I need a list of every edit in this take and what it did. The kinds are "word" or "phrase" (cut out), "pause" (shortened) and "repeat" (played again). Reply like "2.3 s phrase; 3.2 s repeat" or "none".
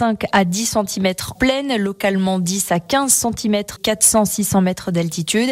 1.4 s word; 3.8 s word